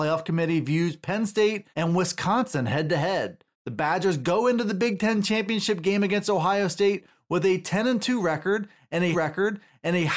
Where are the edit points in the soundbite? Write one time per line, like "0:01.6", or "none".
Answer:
0:01.7
0:03.5
0:09.1